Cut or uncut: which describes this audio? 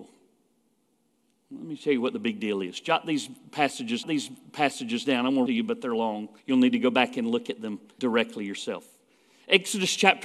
cut